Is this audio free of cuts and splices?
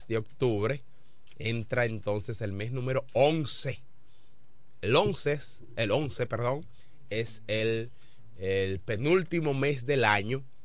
yes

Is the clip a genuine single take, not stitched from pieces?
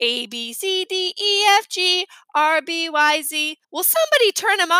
no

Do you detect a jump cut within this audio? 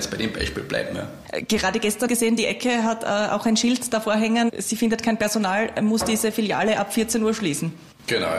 yes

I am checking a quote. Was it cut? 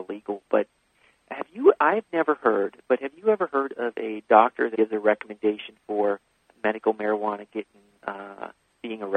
yes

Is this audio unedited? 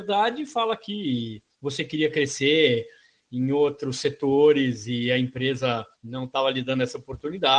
no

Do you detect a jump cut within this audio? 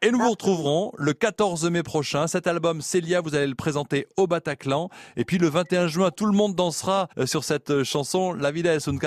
yes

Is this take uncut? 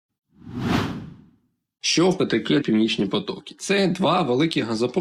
no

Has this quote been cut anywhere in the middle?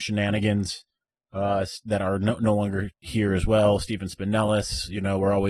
no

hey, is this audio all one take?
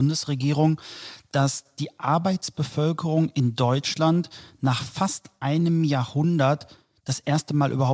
yes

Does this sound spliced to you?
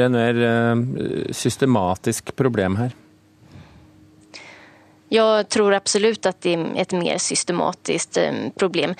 no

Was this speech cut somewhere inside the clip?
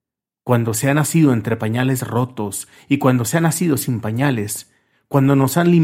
no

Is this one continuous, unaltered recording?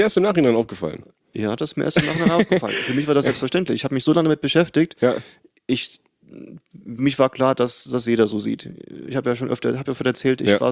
no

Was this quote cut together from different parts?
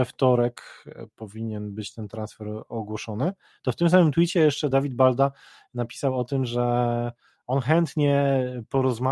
no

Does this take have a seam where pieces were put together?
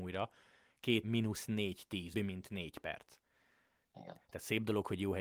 yes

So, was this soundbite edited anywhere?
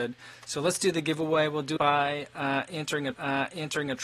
yes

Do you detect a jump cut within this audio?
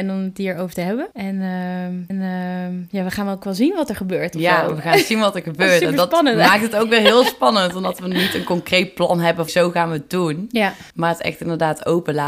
yes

